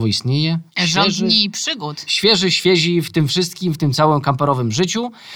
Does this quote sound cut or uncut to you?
uncut